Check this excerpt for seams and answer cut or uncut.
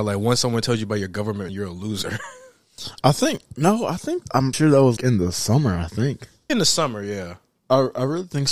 cut